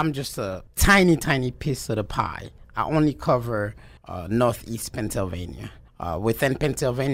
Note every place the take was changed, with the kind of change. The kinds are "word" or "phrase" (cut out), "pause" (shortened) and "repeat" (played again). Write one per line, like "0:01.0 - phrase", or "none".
0:04.0 - pause
0:05.9 - pause